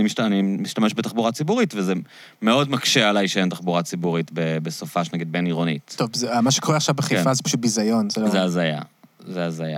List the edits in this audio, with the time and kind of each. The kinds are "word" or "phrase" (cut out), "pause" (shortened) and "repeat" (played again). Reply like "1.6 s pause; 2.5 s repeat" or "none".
none